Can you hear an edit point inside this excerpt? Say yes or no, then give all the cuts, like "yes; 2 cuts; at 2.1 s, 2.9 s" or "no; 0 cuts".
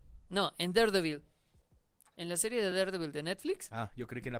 no; 0 cuts